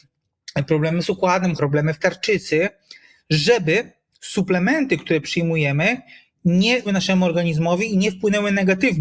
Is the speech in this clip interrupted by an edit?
yes; 3 cuts; at 1.6 s, 2.0 s, 6.8 s

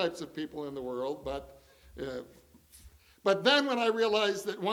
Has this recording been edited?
no; 0 cuts

